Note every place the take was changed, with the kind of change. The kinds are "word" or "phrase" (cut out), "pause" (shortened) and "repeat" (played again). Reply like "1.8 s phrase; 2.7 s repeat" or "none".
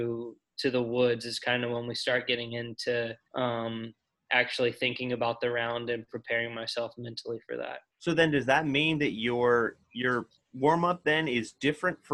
3.2 s pause; 7.9 s pause; 9.8 s pause